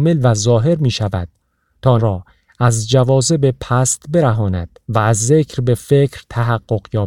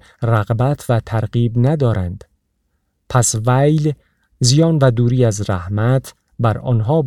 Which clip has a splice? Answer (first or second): first